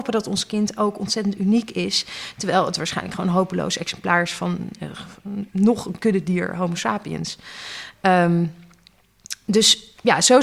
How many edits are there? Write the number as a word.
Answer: zero